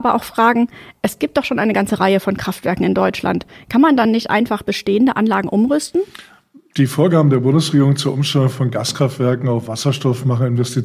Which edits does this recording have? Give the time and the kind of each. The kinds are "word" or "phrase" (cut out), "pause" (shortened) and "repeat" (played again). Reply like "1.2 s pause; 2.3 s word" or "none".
none